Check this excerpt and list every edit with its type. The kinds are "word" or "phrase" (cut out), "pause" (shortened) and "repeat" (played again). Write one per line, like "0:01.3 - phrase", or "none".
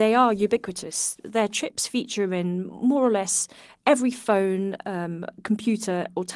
none